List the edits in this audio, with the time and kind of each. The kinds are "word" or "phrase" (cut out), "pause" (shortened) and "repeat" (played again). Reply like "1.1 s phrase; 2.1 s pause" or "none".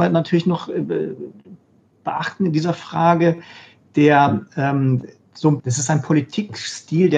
5.6 s word